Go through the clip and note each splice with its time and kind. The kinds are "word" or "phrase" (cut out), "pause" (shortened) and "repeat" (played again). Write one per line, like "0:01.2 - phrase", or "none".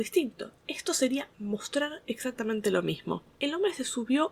none